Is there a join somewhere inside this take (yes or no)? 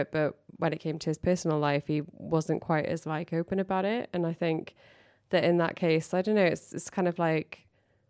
no